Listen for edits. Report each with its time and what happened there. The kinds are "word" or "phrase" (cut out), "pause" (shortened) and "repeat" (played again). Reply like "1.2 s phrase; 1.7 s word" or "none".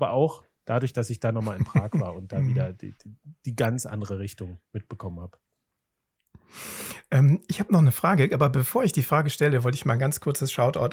4.6 s pause